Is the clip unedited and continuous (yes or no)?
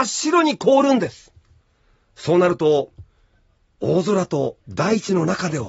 no